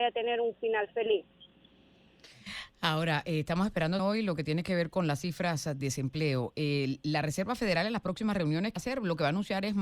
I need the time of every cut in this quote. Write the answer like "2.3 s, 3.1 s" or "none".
4.0 s, 5.8 s, 8.8 s